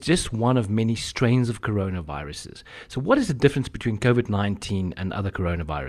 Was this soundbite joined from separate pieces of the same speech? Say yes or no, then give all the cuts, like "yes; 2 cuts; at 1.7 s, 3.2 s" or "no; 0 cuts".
no; 0 cuts